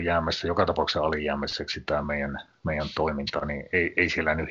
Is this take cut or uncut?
uncut